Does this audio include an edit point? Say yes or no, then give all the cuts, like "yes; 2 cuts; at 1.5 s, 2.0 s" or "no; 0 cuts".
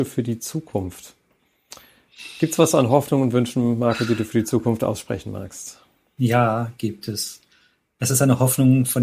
no; 0 cuts